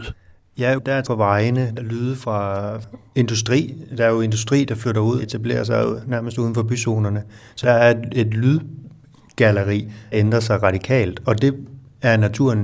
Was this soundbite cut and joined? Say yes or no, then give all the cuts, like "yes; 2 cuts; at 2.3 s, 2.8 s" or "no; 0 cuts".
yes; 5 cuts; at 1.0 s, 1.8 s, 5.2 s, 7.6 s, 10.1 s